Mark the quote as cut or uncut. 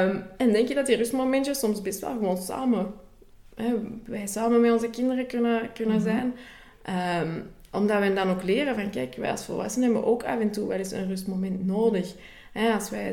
uncut